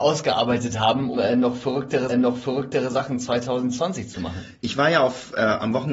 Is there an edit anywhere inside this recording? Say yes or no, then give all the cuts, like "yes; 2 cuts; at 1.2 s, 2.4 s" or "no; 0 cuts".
yes; 2 cuts; at 1.1 s, 2.1 s